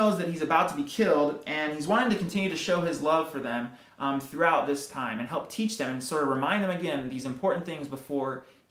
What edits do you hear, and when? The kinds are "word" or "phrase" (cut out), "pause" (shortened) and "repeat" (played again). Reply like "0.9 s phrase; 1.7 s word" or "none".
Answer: none